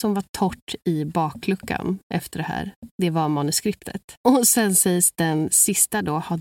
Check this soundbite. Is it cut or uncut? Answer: cut